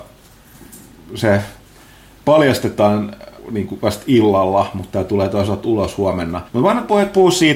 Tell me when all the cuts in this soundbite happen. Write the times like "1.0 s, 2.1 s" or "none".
3.4 s, 6.5 s

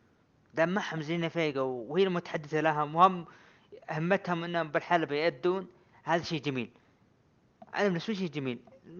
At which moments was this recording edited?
none

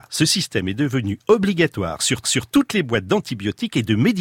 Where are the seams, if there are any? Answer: 2.2 s

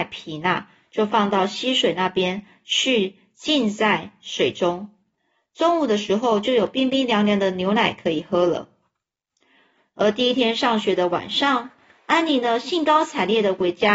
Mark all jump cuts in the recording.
none

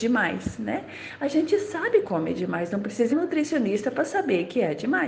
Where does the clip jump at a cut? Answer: 2.0 s, 3.1 s

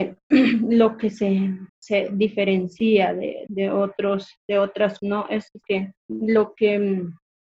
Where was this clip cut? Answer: 1.7 s, 3.5 s, 4.4 s, 5.0 s, 5.6 s, 6.0 s

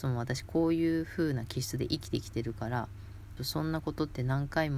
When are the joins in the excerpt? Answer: 3.4 s

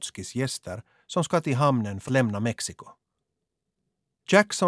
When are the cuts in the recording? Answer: 2.1 s

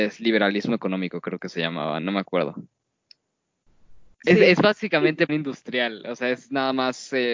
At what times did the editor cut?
5.3 s

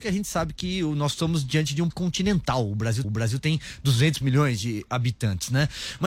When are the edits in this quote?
1.9 s, 3.0 s

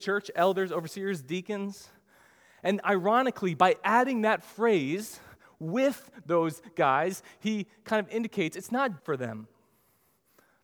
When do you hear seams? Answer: 9.0 s

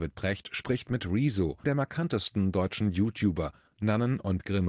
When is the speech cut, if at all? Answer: 1.6 s

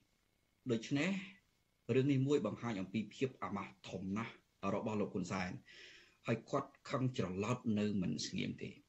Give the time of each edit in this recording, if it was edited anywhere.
none

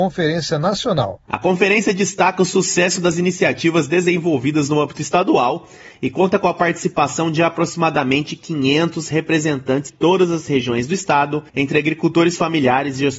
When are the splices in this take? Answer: 9.9 s, 11.5 s

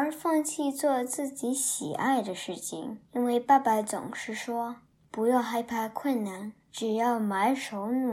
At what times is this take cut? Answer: 3.1 s, 6.6 s

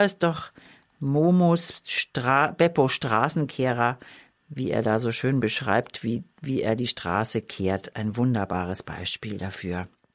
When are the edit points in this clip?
none

